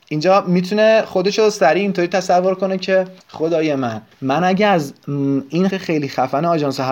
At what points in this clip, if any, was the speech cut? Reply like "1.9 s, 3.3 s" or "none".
3.2 s, 4.1 s, 5.7 s